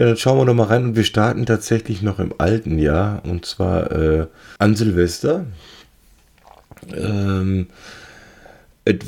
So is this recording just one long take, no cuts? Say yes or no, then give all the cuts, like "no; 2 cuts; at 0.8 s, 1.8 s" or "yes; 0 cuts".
no; 1 cut; at 4.6 s